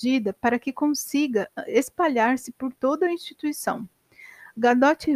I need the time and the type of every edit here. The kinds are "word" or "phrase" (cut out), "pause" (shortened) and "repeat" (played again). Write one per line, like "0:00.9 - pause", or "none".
none

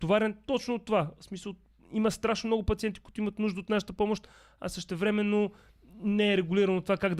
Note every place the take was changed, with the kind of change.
none

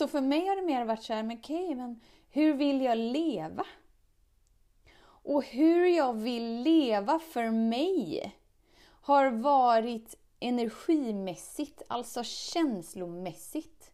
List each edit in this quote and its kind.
none

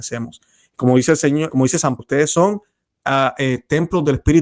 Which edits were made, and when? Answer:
0:01.5 - word
0:02.0 - word

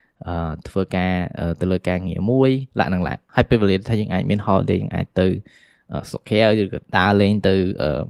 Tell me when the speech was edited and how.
0:02.7 - pause
0:06.9 - pause

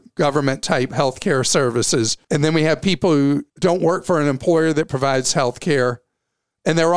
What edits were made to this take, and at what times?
0:02.2 - pause
0:03.5 - pause

